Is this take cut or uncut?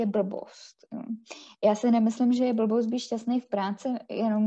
uncut